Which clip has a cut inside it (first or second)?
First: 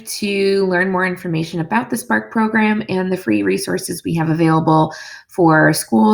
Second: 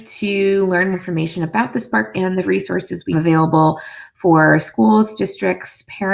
second